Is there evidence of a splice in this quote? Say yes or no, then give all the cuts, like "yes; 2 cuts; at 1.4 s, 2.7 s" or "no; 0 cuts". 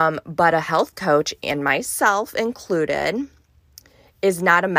no; 0 cuts